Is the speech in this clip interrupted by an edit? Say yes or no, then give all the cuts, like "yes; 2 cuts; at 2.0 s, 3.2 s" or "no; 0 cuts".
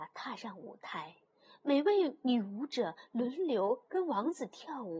no; 0 cuts